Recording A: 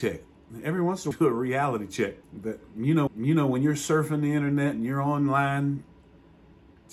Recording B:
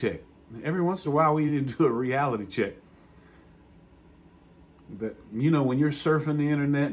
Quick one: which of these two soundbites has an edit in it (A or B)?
A